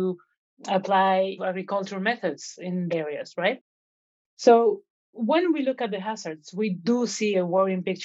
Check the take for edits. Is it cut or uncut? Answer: cut